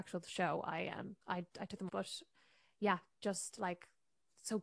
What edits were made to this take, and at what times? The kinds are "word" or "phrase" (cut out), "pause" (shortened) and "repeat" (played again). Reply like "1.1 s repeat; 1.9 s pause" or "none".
1.2 s pause; 1.9 s word